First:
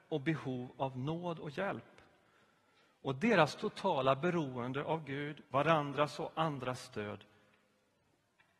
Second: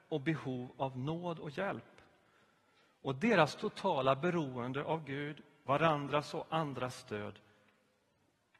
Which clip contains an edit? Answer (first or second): first